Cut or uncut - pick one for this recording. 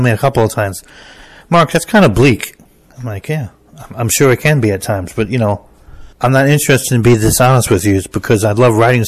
cut